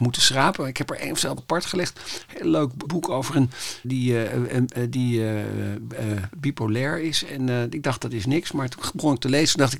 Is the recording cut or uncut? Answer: cut